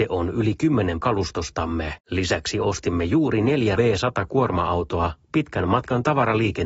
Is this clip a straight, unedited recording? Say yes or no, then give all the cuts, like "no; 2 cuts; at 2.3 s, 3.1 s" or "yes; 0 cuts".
no; 3 cuts; at 1.0 s, 2.0 s, 3.8 s